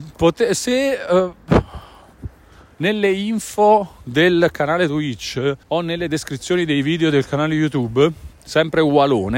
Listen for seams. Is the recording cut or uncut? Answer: cut